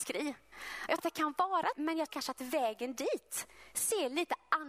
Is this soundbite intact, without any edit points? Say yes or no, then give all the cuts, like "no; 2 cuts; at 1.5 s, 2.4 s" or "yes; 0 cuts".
no; 3 cuts; at 1.0 s, 1.7 s, 2.1 s